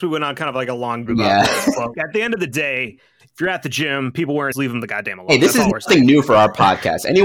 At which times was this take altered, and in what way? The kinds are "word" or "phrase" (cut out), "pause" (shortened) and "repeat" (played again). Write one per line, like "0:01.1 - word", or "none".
0:01.1 - word
0:01.9 - word
0:04.5 - word

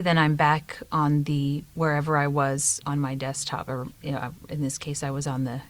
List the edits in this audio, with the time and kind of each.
0:02.8 - word

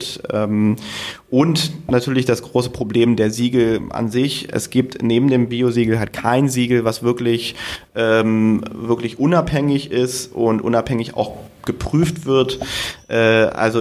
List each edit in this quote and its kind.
none

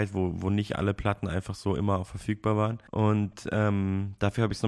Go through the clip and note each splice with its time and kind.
0:02.9 - pause

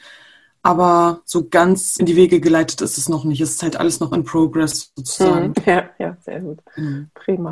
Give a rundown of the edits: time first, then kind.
0:02.0 - word

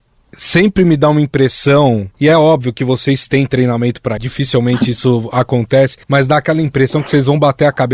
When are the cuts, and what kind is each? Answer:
0:02.1 - pause
0:04.2 - phrase
0:06.0 - pause

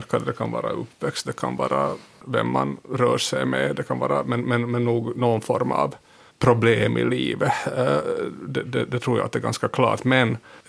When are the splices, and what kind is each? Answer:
none

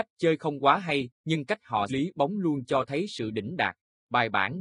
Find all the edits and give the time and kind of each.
0:01.1 - pause
0:01.9 - word

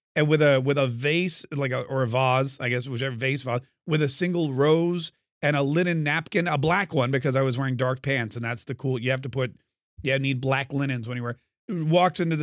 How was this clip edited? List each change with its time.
none

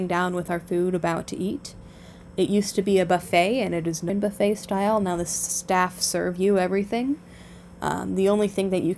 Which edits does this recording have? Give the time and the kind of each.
0:04.1 - word

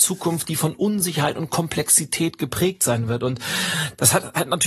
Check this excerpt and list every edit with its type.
none

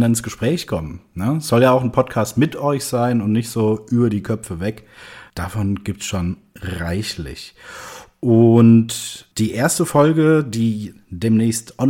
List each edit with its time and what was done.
0:05.3 - pause
0:09.3 - pause

